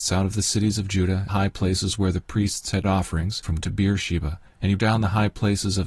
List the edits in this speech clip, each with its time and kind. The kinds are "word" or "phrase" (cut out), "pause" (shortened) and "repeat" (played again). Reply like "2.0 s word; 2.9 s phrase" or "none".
1.3 s phrase; 2.8 s word; 3.6 s word; 4.8 s word